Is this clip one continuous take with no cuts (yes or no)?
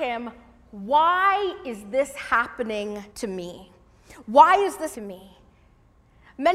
no